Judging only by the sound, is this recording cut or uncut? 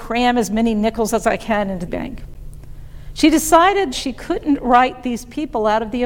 cut